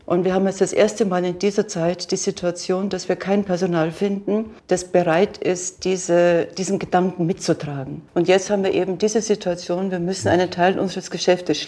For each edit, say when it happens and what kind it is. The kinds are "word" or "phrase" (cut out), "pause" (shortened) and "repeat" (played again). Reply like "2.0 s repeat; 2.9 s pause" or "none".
4.6 s pause; 8.1 s pause